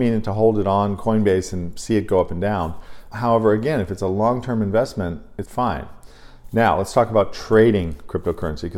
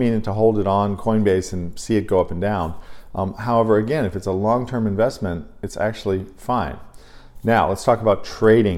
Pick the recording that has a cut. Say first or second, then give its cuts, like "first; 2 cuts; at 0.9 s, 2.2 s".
first; 2 cuts; at 3.1 s, 5.5 s